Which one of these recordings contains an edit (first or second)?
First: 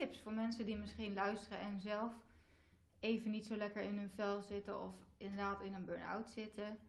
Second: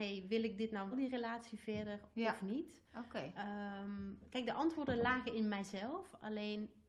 second